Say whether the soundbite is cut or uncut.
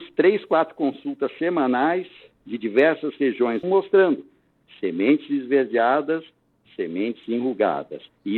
cut